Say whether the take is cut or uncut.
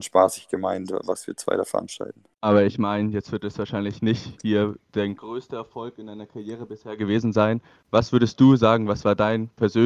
cut